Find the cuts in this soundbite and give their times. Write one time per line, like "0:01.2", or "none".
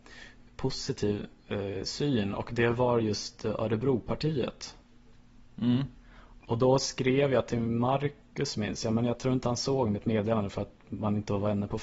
none